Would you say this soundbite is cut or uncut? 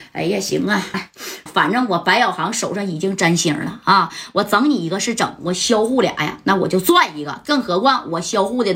cut